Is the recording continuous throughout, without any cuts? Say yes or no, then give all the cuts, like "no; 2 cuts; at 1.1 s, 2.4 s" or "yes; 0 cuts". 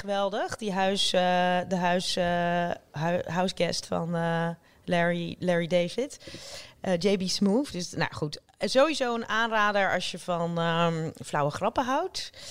yes; 0 cuts